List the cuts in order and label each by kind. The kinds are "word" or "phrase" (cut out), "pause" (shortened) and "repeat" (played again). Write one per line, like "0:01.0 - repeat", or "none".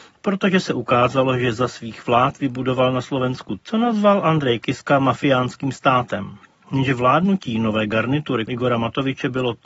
0:03.6 - word
0:08.5 - word